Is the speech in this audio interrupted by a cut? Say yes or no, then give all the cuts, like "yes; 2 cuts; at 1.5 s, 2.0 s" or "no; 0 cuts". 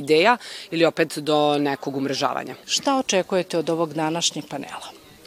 yes; 1 cut; at 2.6 s